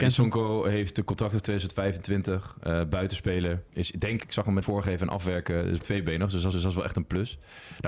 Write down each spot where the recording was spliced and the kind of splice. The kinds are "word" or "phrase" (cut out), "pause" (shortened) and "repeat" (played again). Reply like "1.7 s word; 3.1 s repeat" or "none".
3.7 s pause; 4.2 s phrase; 4.6 s word; 5.8 s word; 6.5 s repeat